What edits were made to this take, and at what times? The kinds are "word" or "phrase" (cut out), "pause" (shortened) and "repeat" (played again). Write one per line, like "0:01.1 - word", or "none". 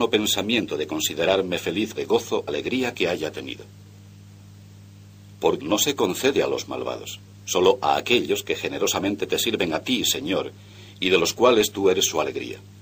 0:02.0 - phrase
0:02.5 - word
0:05.6 - phrase